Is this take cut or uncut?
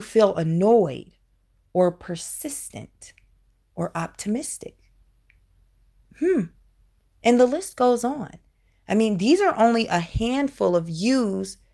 uncut